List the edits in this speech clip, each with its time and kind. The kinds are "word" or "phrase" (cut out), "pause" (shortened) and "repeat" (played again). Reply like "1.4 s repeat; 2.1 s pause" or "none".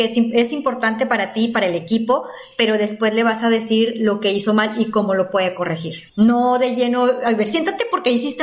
6.1 s pause

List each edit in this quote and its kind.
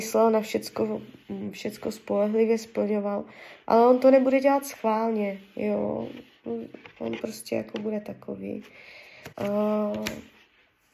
9.3 s pause

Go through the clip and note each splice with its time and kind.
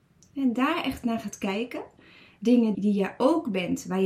2.7 s word

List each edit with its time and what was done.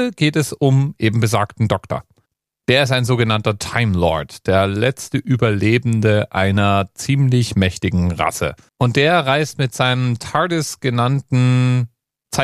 8.7 s pause

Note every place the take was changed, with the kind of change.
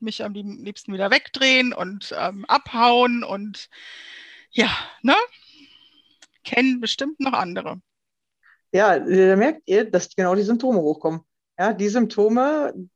none

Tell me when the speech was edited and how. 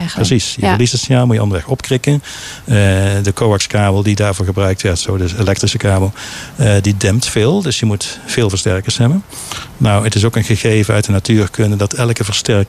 none

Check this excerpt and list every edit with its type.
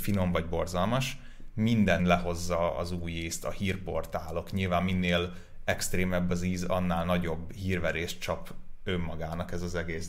2.0 s word

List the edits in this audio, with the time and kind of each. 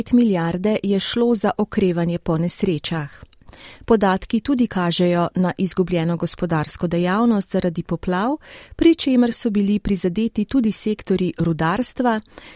none

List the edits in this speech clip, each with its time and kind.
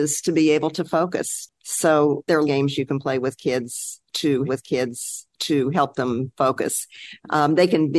1.6 s pause; 2.5 s phrase; 4.5 s repeat

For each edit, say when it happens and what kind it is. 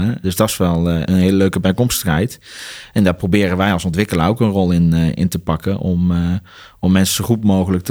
none

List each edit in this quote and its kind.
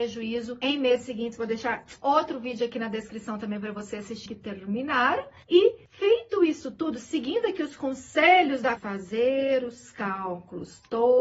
4.3 s word; 8.8 s phrase

